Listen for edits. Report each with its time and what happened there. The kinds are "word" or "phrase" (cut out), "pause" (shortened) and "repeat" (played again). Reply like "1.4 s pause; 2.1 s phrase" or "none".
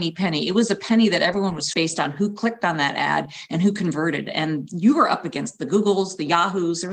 1.7 s phrase